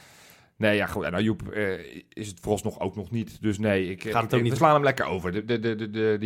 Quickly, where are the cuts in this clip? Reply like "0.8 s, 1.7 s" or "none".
4.6 s